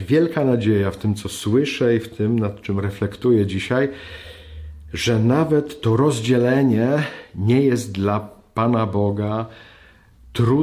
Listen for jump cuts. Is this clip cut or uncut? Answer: uncut